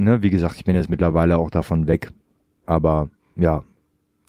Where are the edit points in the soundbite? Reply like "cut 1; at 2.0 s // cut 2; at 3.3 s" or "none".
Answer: none